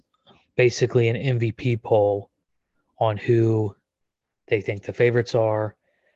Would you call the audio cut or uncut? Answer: uncut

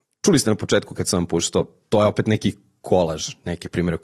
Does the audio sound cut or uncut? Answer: uncut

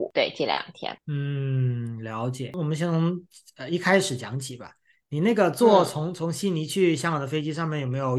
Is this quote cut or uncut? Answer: uncut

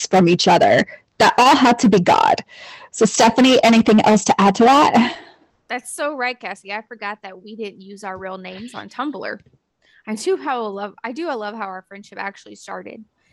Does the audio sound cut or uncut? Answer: uncut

